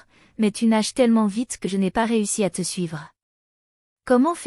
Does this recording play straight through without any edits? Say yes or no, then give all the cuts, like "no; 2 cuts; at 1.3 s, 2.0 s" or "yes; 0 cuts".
yes; 0 cuts